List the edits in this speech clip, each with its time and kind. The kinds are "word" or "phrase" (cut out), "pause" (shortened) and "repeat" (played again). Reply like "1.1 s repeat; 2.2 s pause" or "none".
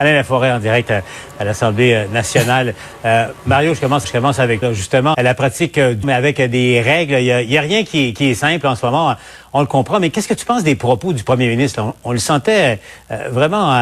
4.0 s word; 4.6 s word; 5.1 s word; 6.0 s word